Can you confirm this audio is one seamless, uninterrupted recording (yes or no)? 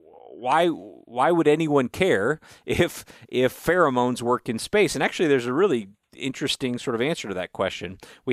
yes